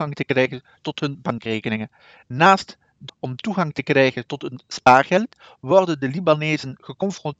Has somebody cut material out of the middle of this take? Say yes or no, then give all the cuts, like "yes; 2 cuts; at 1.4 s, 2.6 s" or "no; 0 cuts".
yes; 1 cut; at 3.1 s